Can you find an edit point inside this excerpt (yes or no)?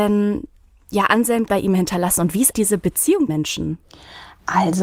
yes